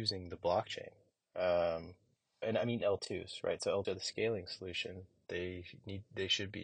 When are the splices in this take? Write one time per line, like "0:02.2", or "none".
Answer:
0:02.4
0:02.8
0:03.8